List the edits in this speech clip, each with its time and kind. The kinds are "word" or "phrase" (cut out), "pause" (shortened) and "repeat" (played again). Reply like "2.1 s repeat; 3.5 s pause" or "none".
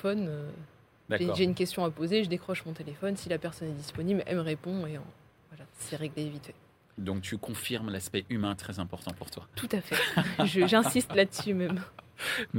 none